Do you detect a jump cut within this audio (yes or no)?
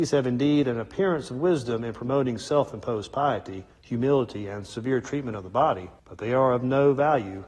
yes